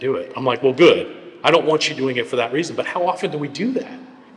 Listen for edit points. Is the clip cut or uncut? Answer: uncut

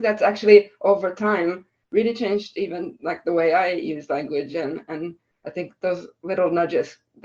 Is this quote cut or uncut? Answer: uncut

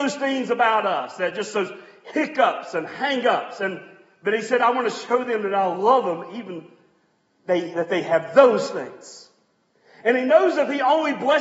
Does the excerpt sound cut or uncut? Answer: uncut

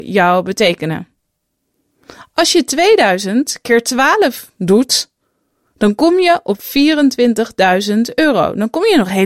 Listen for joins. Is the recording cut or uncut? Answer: uncut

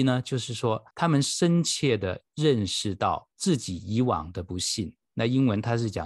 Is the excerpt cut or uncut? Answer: cut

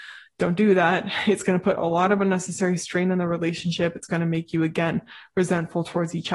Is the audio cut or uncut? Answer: uncut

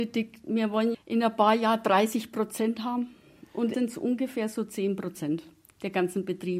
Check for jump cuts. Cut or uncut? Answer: cut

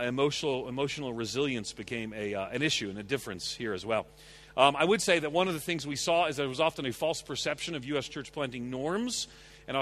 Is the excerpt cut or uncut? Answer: uncut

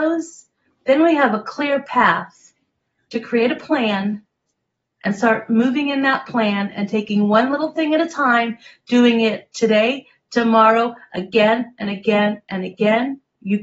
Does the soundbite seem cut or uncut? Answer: uncut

